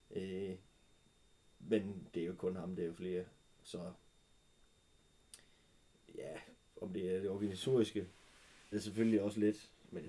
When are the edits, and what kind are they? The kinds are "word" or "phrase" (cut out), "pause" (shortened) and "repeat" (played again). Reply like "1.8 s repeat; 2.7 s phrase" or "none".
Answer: 8.7 s word